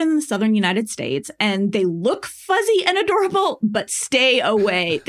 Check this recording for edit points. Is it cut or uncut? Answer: uncut